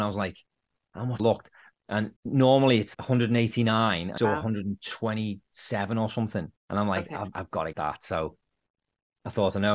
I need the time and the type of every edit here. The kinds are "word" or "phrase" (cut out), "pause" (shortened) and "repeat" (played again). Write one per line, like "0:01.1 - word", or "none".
0:01.2 - phrase
0:02.2 - pause
0:02.9 - word
0:04.2 - phrase
0:06.6 - pause
0:07.3 - word
0:07.7 - word